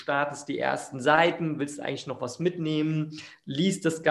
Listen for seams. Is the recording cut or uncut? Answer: uncut